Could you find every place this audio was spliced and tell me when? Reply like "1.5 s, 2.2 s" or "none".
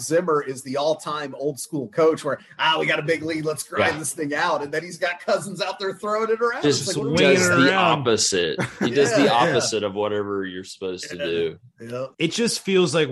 12.1 s